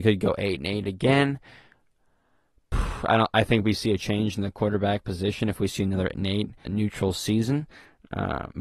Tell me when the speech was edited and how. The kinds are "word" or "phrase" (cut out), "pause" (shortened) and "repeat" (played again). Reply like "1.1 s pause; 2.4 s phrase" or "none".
6.1 s word; 6.6 s word